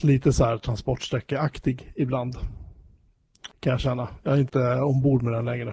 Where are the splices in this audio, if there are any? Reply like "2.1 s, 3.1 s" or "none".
3.5 s, 4.5 s